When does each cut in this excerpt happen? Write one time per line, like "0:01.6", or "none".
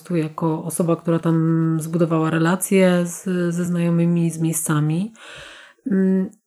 none